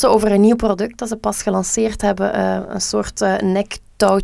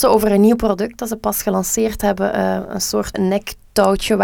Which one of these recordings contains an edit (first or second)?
second